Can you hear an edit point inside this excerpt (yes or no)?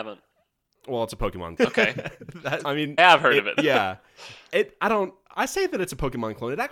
yes